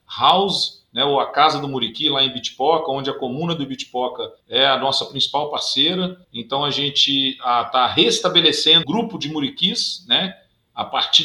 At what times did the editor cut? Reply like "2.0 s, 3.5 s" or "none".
4.4 s, 6.2 s, 8.8 s